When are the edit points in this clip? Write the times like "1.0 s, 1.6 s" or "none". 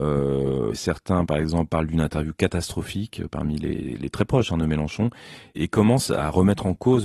none